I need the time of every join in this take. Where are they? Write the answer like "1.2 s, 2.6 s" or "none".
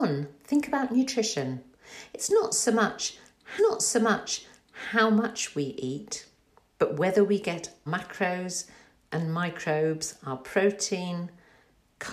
3.6 s, 7.9 s